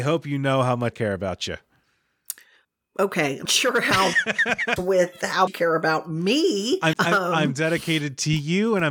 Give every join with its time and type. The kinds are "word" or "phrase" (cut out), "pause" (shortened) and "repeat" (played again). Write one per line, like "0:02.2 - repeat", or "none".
0:00.9 - word
0:03.4 - word
0:04.1 - word
0:04.8 - word
0:05.5 - word
0:06.9 - word